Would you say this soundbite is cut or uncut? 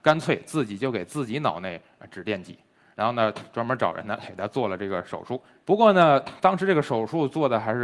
uncut